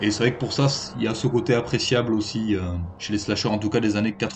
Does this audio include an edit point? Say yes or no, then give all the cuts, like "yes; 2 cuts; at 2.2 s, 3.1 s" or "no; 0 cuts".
no; 0 cuts